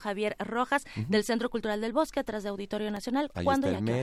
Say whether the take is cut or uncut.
uncut